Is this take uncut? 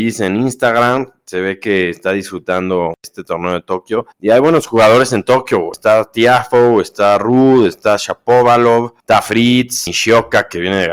no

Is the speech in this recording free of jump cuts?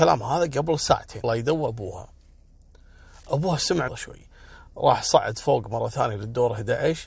no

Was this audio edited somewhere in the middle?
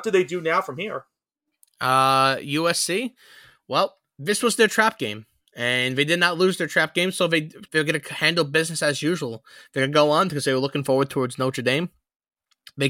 yes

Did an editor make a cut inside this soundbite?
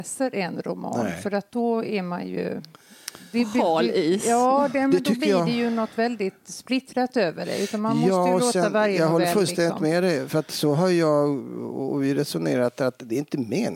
yes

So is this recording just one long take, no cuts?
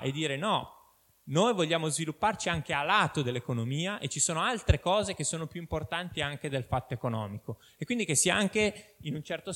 yes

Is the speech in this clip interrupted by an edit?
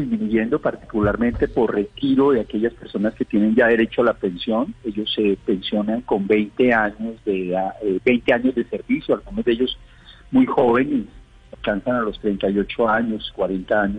no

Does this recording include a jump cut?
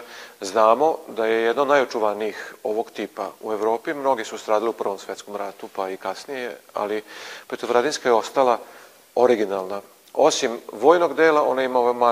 no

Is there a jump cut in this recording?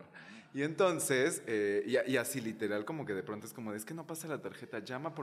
no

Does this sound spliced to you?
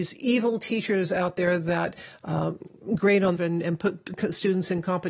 yes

